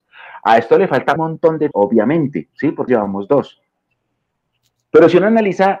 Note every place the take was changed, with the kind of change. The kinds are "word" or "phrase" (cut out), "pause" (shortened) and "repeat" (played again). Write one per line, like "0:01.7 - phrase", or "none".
0:01.2 - word
0:01.7 - word
0:02.9 - word